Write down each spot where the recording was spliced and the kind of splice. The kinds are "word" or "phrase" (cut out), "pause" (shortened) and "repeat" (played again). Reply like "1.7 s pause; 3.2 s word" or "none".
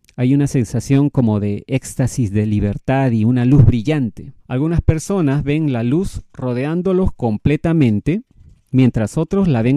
4.4 s pause